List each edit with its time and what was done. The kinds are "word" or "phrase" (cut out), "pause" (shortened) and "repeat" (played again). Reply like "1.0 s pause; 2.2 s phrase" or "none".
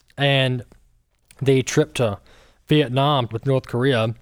3.3 s word

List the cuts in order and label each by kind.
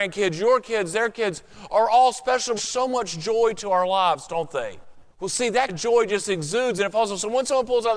2.6 s phrase; 5.1 s pause; 5.7 s word

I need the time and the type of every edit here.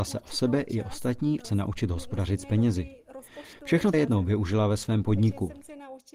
1.4 s phrase; 3.9 s phrase

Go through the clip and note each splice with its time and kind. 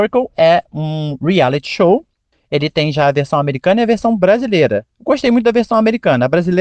none

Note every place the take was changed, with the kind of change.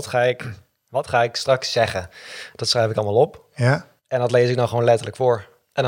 4.0 s pause

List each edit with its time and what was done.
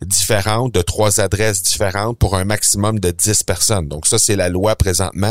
none

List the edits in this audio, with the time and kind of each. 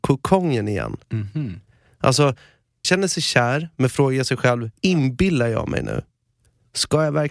1.0 s pause; 2.8 s word; 4.8 s pause

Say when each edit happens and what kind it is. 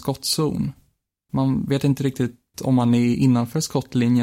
none

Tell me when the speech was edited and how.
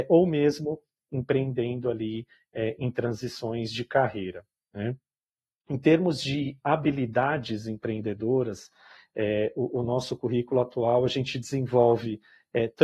none

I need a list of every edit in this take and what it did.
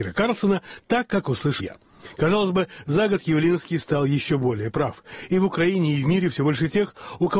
1.6 s word

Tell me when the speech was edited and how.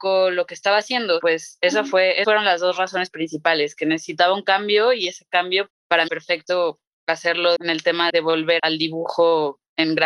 2.2 s word; 5.7 s word; 6.1 s word; 7.6 s word; 8.1 s word; 8.6 s word

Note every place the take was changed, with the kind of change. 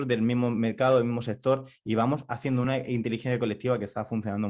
none

